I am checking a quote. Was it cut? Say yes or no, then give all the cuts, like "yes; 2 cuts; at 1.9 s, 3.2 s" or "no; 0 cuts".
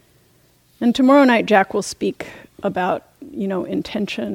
no; 0 cuts